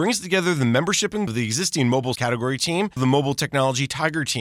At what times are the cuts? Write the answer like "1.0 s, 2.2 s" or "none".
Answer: 1.3 s, 2.2 s, 3.0 s